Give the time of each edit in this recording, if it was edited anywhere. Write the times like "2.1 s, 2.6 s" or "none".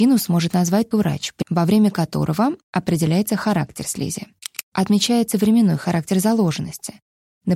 0.9 s, 1.4 s